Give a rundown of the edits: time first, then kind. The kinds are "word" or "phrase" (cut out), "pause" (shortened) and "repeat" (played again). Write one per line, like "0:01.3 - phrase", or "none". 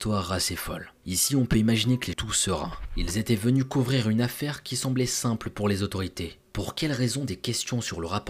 0:02.1 - phrase